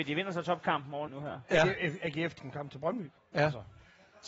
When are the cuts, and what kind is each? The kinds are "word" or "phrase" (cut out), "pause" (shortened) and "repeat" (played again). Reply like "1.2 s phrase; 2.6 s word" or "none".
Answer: 1.1 s word; 2.4 s phrase; 3.2 s pause